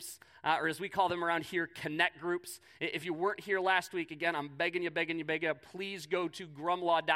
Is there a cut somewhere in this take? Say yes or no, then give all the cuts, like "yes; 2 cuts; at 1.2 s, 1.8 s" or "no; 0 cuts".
no; 0 cuts